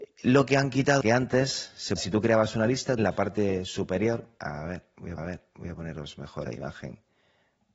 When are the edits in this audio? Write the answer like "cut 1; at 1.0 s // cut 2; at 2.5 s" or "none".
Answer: cut 1; at 1.0 s // cut 2; at 2.0 s // cut 3; at 3.0 s // cut 4; at 4.4 s // cut 5; at 5.2 s // cut 6; at 6.5 s